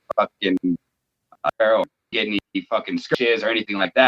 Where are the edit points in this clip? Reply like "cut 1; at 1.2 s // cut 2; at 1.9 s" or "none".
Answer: cut 1; at 1.5 s // cut 2; at 2.1 s